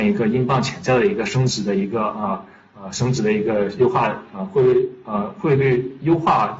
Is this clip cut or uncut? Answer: uncut